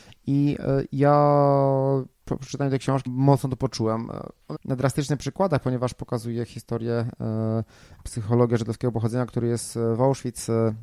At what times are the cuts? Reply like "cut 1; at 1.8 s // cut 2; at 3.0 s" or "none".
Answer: cut 1; at 3.1 s // cut 2; at 4.5 s // cut 3; at 8.0 s